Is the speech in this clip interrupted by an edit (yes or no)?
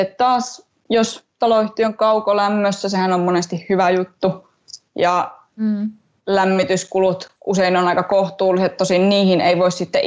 yes